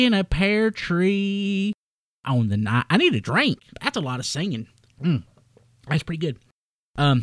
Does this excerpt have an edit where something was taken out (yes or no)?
yes